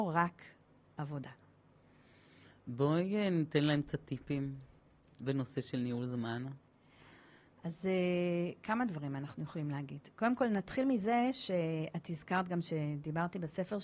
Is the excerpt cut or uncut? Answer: uncut